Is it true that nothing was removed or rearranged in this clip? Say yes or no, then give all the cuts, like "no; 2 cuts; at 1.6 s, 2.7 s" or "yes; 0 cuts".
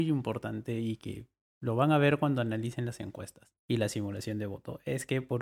yes; 0 cuts